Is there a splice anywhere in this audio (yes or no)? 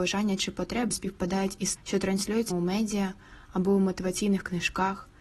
yes